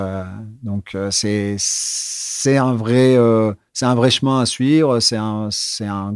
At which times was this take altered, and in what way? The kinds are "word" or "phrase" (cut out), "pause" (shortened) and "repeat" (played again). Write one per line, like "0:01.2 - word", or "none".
none